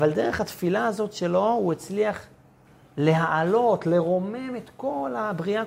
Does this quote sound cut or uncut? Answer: cut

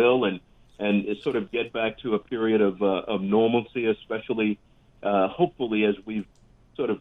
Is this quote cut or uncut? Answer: uncut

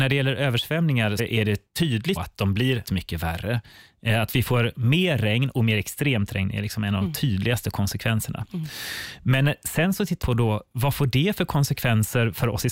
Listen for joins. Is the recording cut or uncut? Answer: cut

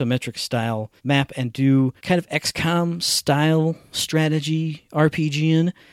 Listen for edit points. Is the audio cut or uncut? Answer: cut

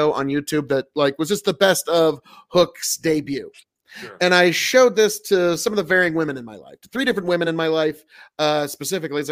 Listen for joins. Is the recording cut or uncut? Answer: uncut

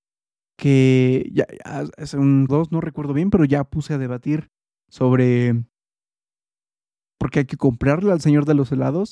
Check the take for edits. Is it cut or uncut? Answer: cut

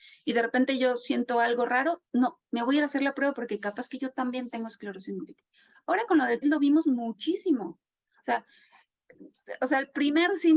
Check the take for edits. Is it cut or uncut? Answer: cut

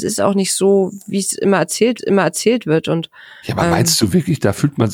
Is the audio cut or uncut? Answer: cut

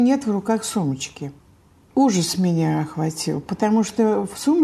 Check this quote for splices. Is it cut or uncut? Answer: uncut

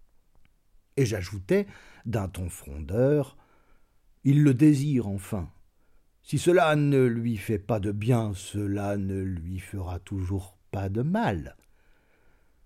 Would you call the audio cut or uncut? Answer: uncut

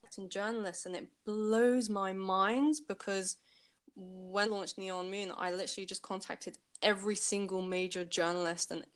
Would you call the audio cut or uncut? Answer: cut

